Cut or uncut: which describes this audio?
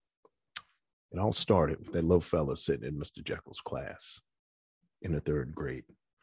uncut